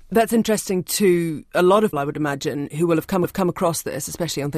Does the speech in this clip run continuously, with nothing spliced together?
no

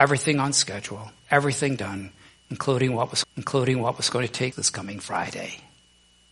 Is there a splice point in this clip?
yes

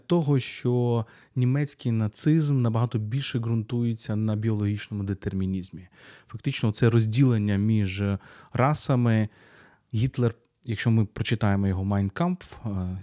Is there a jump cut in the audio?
no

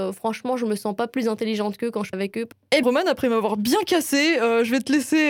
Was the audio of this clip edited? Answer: yes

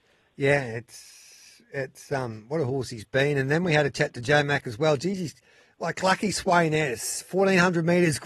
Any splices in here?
no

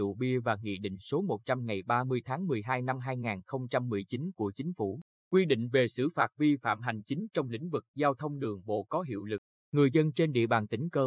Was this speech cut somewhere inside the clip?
no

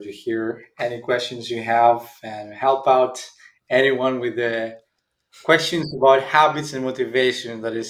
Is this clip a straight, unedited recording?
yes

